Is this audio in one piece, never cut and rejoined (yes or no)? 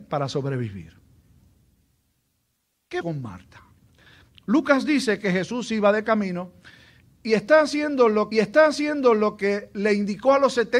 no